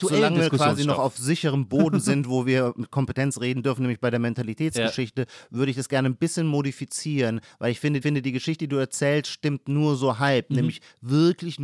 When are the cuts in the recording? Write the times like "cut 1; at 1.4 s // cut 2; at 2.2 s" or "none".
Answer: cut 1; at 8.0 s